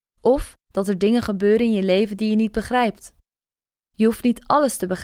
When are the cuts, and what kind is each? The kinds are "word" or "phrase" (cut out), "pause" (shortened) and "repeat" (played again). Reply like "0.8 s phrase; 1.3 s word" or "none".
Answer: none

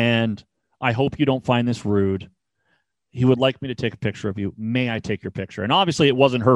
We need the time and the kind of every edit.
none

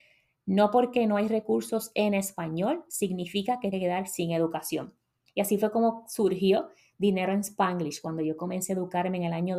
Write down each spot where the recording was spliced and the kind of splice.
3.7 s phrase

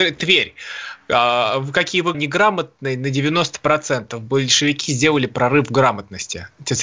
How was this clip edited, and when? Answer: 2.1 s phrase

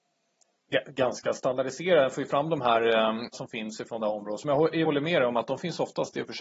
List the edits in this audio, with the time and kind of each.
3.3 s phrase; 4.8 s word

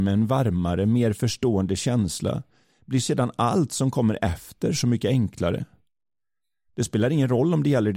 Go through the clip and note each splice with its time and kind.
none

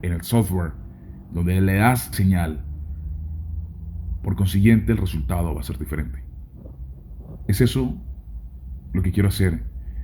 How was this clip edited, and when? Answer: 2.1 s word

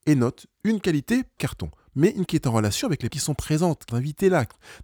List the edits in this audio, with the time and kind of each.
1.4 s word; 2.3 s word; 3.1 s word; 3.9 s word

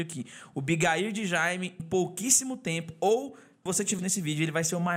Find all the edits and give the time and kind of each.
1.8 s word; 3.7 s word; 4.0 s word

